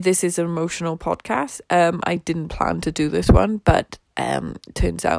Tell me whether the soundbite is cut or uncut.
uncut